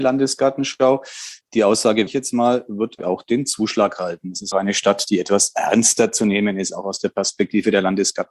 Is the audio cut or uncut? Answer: cut